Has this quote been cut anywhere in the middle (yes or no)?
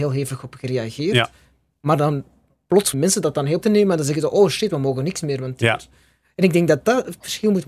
yes